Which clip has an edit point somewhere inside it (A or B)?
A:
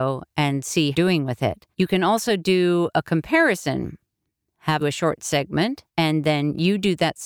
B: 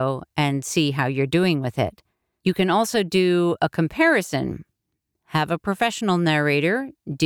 A